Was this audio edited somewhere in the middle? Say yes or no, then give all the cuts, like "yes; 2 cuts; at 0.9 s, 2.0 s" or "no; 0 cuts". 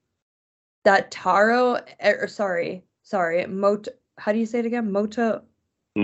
no; 0 cuts